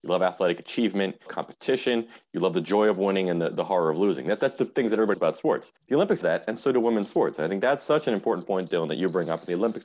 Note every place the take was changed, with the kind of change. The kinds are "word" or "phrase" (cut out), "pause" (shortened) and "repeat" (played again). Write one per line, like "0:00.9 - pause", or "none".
0:01.3 - phrase
0:05.1 - word
0:05.8 - pause
0:06.2 - word